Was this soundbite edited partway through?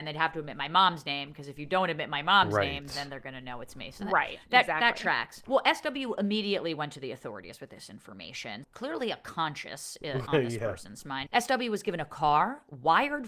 yes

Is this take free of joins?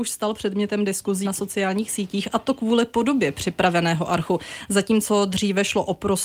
no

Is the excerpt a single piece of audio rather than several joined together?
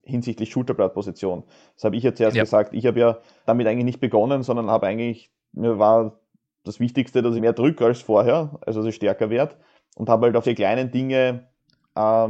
no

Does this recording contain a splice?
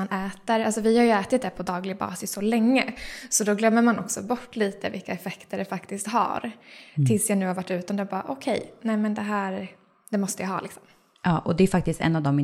no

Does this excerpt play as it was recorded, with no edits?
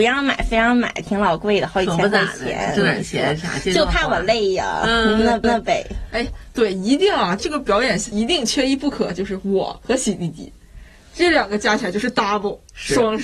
no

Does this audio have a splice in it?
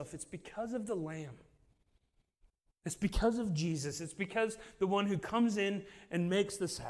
no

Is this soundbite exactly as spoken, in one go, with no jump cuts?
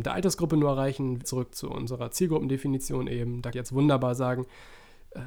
no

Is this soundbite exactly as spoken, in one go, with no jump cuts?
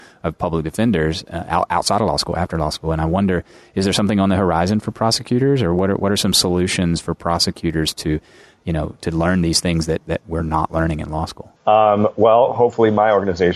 no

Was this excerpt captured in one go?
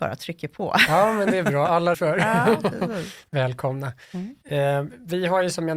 no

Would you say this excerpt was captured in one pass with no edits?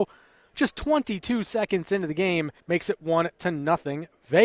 no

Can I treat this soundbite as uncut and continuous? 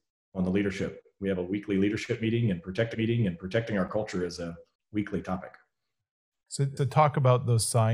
no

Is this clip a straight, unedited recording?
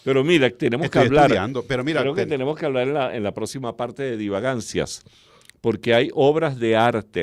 yes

